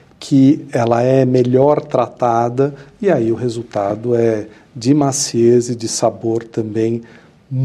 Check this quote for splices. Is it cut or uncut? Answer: uncut